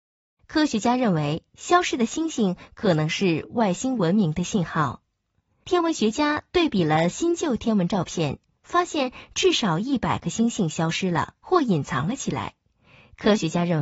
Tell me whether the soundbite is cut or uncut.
uncut